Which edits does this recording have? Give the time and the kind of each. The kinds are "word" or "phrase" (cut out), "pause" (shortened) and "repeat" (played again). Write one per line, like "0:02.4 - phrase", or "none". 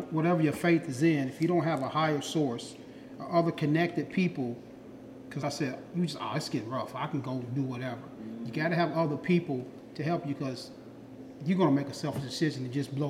0:05.4 - word